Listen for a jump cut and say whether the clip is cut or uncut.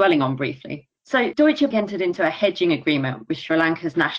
cut